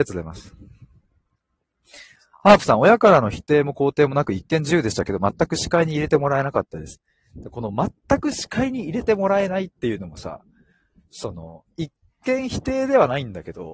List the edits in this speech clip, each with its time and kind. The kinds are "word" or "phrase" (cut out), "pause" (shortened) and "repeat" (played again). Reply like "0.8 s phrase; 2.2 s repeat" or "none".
none